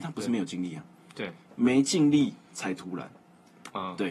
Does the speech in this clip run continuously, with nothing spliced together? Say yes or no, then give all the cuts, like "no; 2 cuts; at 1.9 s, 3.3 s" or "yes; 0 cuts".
yes; 0 cuts